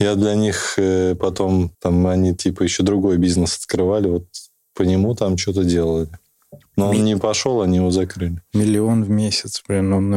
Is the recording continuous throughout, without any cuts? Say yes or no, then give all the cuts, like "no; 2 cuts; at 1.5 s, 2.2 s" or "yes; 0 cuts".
no; 1 cut; at 1.7 s